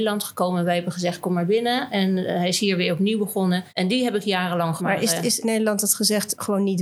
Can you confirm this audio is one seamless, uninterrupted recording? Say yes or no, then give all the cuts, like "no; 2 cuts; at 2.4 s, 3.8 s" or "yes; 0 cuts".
no; 3 cuts; at 3.7 s, 4.8 s, 5.4 s